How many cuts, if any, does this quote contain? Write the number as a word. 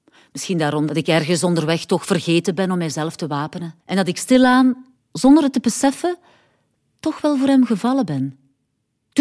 one